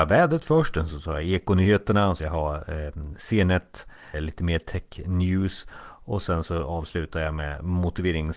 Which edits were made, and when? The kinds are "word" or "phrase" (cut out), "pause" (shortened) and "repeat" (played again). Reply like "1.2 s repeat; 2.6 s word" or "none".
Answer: 2.2 s phrase; 4.1 s word